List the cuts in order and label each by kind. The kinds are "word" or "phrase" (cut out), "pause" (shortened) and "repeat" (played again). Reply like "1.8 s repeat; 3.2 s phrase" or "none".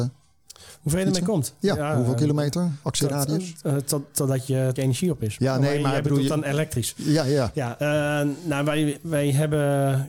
4.8 s word